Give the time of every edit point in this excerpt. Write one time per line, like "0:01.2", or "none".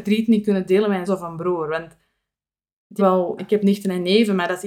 0:01.1
0:03.0
0:03.4